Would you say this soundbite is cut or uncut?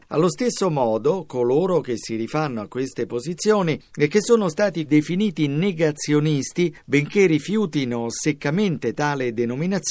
cut